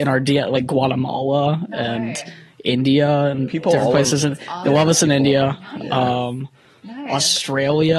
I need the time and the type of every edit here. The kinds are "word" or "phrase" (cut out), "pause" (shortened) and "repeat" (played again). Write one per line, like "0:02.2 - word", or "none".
none